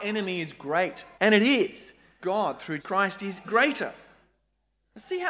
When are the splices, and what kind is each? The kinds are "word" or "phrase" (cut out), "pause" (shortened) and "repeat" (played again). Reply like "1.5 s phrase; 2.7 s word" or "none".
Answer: 1.1 s pause; 2.2 s phrase; 2.8 s word; 3.4 s word